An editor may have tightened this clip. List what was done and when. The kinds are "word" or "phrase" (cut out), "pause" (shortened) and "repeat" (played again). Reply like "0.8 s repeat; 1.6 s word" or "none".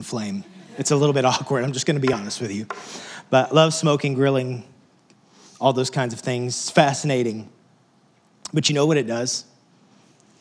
none